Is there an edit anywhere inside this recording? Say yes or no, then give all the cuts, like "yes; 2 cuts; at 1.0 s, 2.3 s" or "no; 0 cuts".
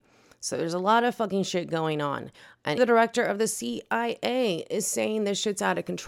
yes; 1 cut; at 2.8 s